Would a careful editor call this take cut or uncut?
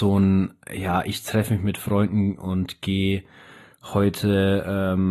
uncut